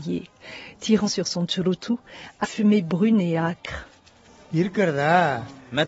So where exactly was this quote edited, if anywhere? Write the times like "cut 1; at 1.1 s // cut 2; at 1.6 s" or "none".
cut 1; at 1.1 s // cut 2; at 2.4 s

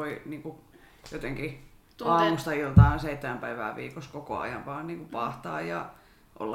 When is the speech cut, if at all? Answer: none

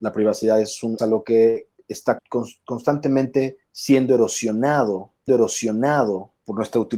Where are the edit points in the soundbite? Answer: cut 1; at 1.0 s // cut 2; at 2.2 s // cut 3; at 3.6 s // cut 4; at 5.3 s

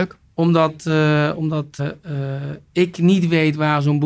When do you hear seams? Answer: cut 1; at 1.8 s

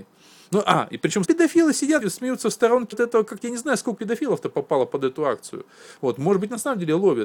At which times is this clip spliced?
cut 1; at 1.2 s // cut 2; at 2.0 s // cut 3; at 2.9 s // cut 4; at 3.4 s // cut 5; at 4.0 s

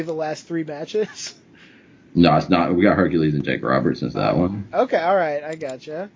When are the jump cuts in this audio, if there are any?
cut 1; at 4.1 s

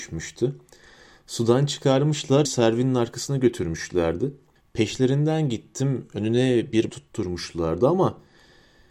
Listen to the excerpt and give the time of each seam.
cut 1; at 2.5 s // cut 2; at 4.6 s // cut 3; at 6.9 s

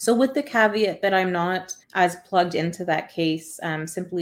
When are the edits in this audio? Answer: cut 1; at 1.8 s

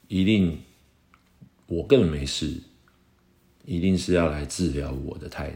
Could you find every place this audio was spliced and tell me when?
none

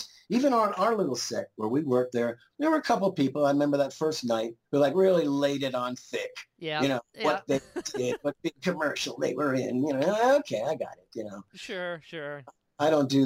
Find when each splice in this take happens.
cut 1; at 4.7 s

